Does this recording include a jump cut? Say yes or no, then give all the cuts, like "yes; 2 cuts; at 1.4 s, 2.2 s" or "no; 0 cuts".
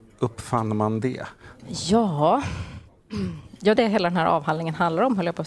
yes; 2 cuts; at 1.6 s, 3.8 s